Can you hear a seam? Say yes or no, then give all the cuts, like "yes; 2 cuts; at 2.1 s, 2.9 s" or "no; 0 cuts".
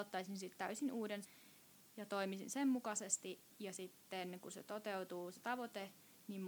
yes; 1 cut; at 1.2 s